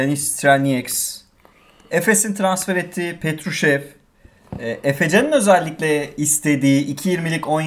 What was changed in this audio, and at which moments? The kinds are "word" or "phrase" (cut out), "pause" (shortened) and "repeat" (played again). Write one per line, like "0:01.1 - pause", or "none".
none